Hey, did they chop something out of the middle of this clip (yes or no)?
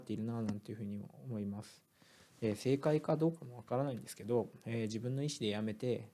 no